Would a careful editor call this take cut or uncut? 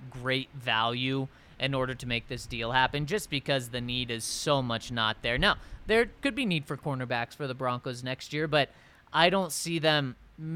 uncut